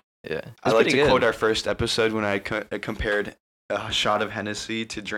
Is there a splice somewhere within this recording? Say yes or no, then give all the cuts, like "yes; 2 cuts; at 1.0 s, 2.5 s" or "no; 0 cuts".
no; 0 cuts